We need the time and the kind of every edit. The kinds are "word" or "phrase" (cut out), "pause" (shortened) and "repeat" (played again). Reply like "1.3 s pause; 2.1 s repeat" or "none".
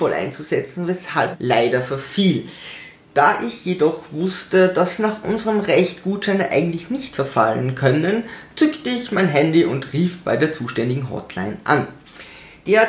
1.3 s word